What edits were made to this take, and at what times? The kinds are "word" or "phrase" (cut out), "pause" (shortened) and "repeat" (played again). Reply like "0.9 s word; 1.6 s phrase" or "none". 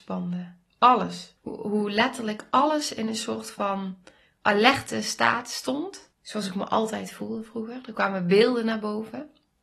1.4 s pause; 6.1 s pause